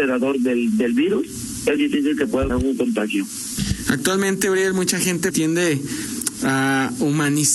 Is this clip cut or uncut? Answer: cut